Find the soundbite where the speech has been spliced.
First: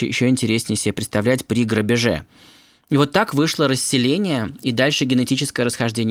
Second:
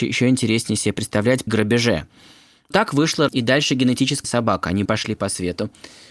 second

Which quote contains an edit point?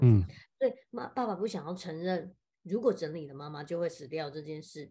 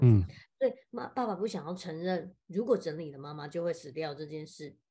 second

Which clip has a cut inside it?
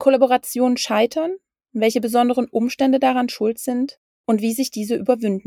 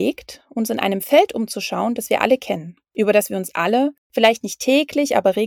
second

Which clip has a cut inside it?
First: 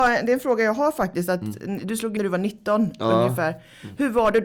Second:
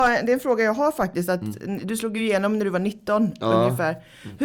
first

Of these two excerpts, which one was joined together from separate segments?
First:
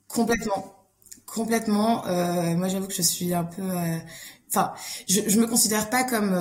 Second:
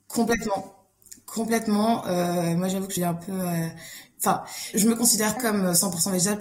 second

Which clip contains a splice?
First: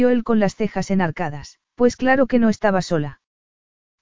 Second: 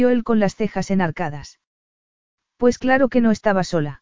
first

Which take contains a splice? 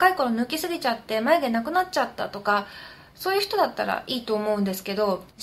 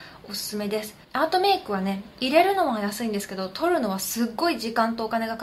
second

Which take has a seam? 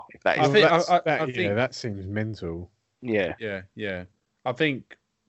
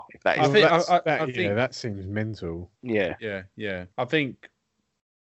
second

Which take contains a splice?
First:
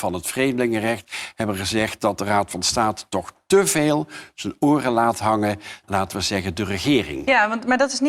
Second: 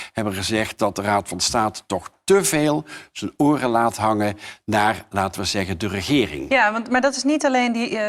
first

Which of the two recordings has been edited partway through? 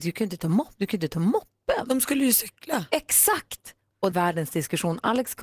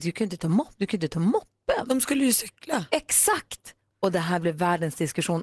first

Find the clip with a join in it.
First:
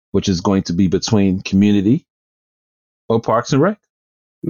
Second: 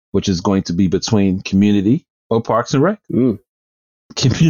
second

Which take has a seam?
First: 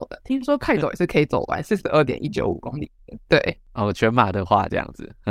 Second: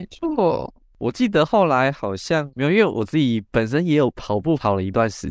second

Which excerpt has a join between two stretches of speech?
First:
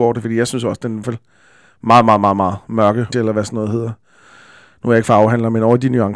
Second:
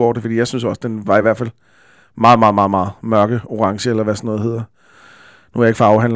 first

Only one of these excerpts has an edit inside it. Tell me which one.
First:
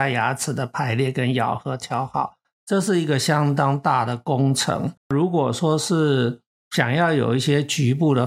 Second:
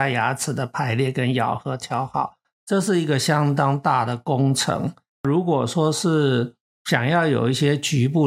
first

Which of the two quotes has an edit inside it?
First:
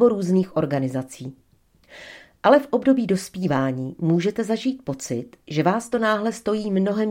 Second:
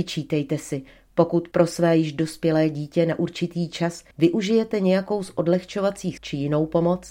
second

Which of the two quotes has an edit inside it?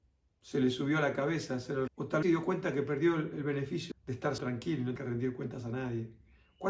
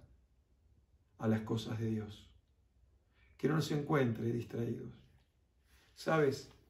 first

